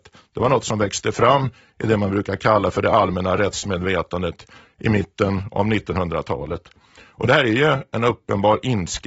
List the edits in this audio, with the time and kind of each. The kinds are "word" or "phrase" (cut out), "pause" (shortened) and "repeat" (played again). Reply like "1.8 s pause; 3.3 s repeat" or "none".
none